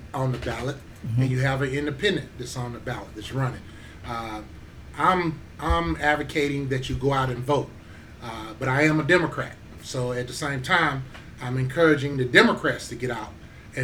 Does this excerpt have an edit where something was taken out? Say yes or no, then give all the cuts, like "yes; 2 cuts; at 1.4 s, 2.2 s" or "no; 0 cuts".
no; 0 cuts